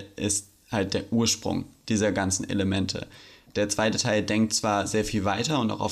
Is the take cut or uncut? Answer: uncut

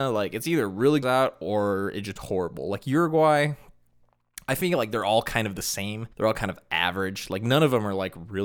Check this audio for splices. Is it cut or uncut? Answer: cut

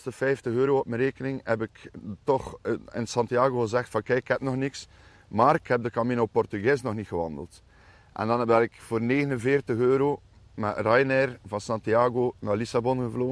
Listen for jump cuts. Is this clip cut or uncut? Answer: uncut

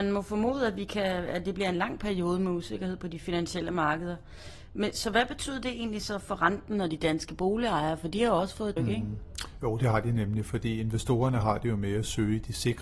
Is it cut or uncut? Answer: cut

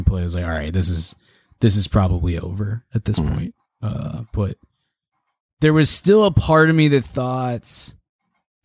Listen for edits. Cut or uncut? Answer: uncut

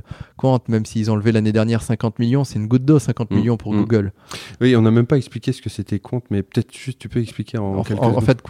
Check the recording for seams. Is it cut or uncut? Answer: uncut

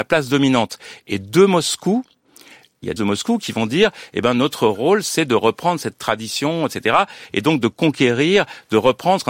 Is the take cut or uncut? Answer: cut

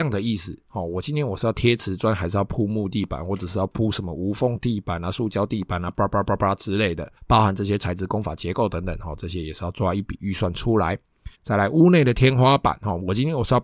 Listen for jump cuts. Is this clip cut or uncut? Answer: cut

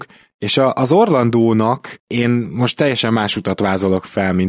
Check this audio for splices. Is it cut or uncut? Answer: uncut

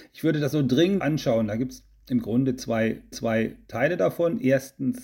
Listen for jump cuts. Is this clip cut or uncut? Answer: cut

